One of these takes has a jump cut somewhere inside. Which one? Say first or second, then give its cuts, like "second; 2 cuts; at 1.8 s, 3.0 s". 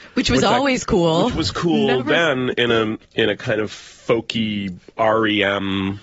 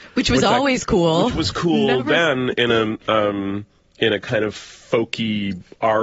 first; 1 cut; at 3.0 s